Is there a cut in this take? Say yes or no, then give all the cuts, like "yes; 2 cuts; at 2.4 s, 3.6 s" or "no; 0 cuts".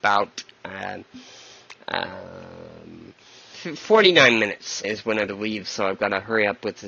yes; 3 cuts; at 3.5 s, 4.8 s, 5.3 s